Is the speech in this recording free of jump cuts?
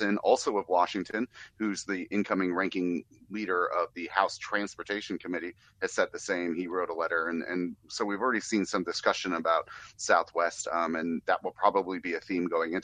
yes; 0 cuts

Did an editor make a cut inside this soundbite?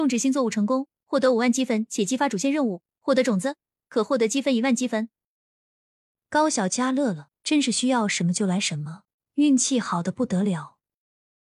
yes; 2 cuts; at 7.4 s, 9.1 s

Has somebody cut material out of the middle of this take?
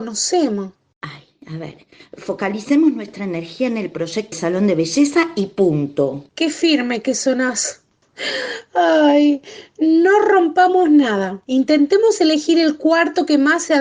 yes; 1 cut; at 4.3 s

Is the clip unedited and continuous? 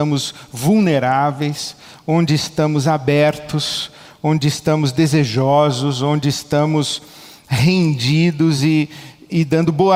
yes; 0 cuts

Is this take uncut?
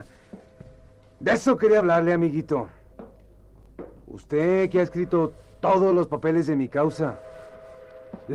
yes; 0 cuts

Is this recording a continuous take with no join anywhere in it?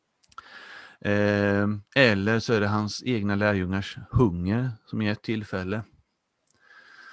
no; 1 cut; at 1.9 s

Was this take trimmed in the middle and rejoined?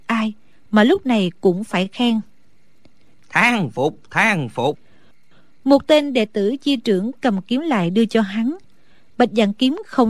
no; 0 cuts

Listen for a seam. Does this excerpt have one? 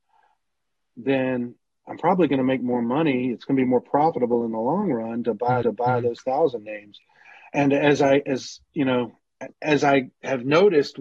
yes; 2 cuts; at 5.6 s, 9.5 s

